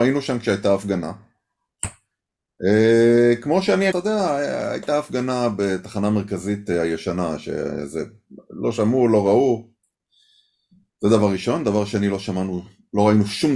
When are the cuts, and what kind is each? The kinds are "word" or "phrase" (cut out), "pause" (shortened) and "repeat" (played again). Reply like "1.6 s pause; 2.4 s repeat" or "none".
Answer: 3.9 s phrase